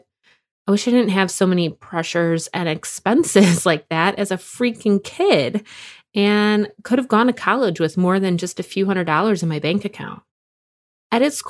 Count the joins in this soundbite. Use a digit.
0